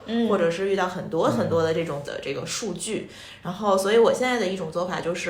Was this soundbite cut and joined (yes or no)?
yes